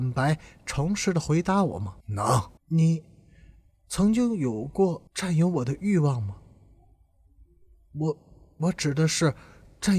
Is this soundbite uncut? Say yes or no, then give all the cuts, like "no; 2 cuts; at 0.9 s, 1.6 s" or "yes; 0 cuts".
no; 3 cuts; at 2.0 s, 2.6 s, 5.1 s